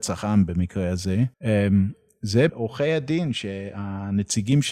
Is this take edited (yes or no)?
yes